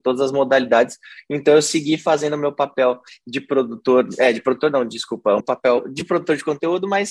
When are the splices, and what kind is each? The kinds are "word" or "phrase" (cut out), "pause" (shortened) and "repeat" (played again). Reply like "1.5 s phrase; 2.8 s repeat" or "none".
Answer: 5.4 s word